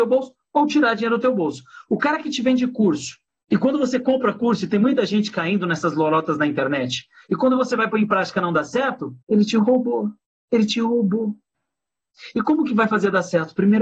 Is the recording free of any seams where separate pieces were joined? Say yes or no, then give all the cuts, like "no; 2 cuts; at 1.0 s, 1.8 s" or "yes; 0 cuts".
no; 3 cuts; at 3.3 s, 9.2 s, 10.2 s